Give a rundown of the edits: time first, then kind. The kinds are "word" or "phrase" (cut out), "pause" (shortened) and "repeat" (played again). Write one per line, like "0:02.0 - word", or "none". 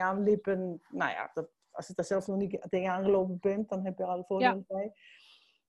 none